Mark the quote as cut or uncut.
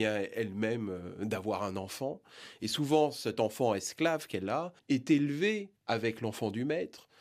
cut